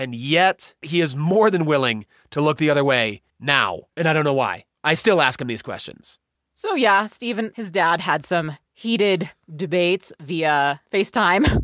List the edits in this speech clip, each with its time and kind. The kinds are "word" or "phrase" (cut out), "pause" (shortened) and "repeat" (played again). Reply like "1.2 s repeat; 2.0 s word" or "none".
none